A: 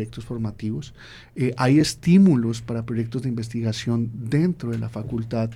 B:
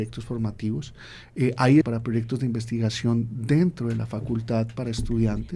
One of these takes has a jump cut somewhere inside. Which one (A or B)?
B